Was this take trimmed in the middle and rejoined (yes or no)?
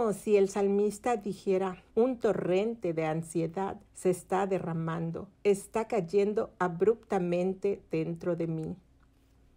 yes